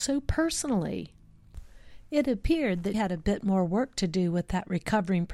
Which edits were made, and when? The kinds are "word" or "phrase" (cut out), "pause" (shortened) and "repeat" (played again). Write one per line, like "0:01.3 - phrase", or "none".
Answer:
0:02.9 - word